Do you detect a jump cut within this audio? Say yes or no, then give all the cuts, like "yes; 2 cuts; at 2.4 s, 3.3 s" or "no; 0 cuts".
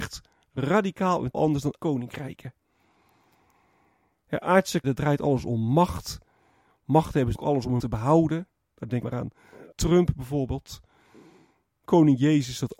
yes; 8 cuts; at 1.3 s, 1.8 s, 4.8 s, 7.3 s, 7.8 s, 9.0 s, 9.7 s, 11.9 s